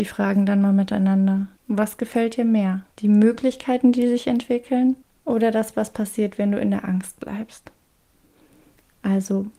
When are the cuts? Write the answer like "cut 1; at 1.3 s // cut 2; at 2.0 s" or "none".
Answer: cut 1; at 1.6 s // cut 2; at 2.9 s // cut 3; at 5.0 s